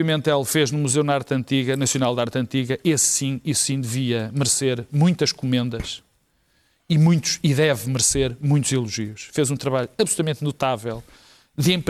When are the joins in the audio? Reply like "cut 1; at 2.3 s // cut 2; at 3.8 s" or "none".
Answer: none